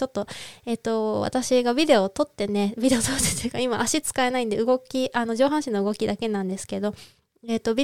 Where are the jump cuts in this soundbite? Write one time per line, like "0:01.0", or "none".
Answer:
none